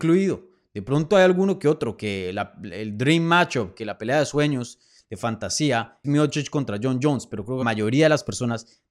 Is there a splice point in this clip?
yes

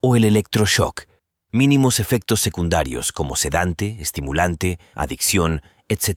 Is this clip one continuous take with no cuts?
no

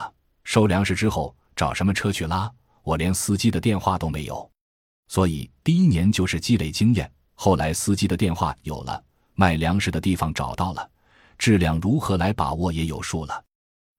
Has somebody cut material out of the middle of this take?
no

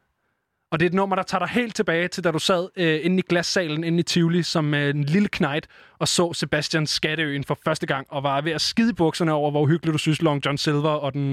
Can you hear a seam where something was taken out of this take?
no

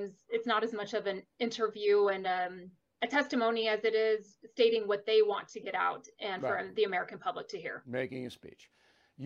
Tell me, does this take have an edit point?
no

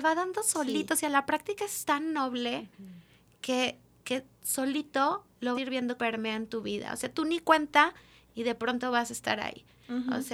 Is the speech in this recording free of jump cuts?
no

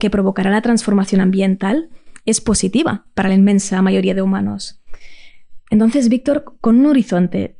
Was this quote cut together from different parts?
no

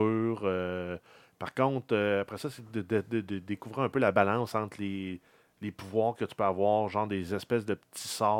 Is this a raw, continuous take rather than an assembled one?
yes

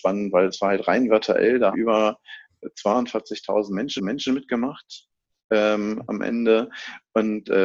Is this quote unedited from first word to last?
no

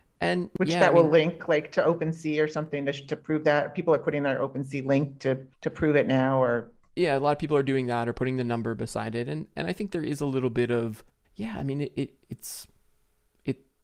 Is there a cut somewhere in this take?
yes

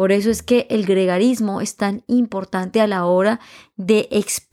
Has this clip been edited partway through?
no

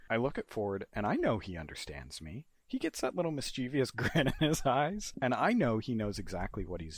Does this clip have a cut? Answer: no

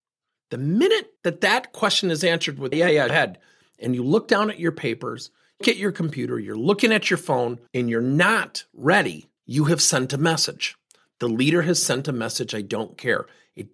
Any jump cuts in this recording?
yes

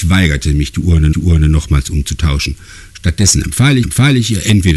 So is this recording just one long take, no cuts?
no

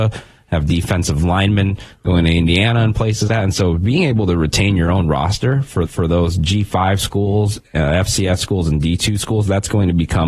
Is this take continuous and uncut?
no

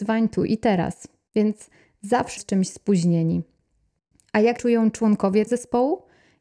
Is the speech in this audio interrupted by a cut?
yes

